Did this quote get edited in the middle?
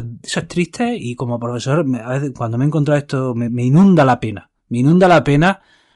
yes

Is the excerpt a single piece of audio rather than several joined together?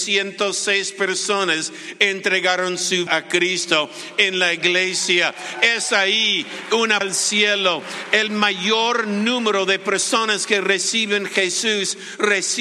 no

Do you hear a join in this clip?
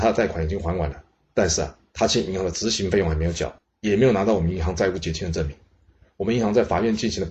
no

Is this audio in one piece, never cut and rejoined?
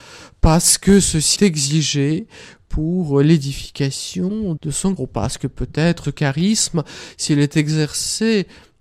no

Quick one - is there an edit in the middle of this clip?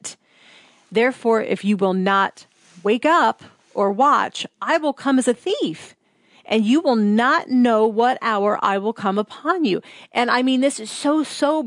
no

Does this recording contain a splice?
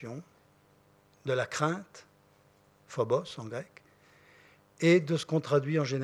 no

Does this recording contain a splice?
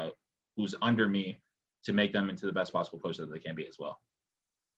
no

